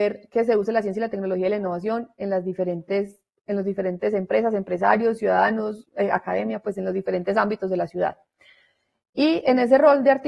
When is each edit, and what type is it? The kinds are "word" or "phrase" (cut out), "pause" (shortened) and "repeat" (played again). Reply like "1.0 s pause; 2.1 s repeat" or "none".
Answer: none